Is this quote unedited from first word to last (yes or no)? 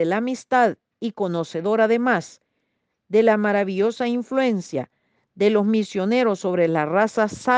yes